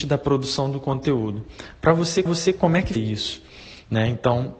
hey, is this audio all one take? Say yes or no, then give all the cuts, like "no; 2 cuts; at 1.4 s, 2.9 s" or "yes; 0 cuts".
no; 2 cuts; at 2.3 s, 3.0 s